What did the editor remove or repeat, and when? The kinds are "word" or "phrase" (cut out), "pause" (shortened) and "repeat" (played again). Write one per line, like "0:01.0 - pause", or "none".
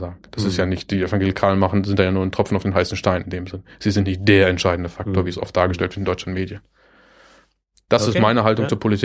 none